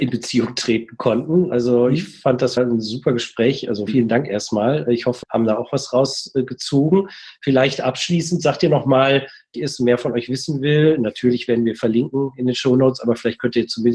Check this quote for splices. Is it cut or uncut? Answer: cut